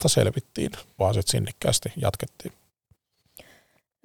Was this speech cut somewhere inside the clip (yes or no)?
yes